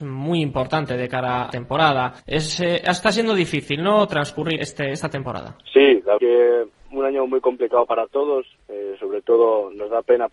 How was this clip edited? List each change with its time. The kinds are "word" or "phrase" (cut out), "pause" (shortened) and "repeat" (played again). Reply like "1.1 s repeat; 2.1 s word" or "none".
1.5 s word; 2.2 s pause; 4.6 s word; 5.6 s pause; 6.2 s word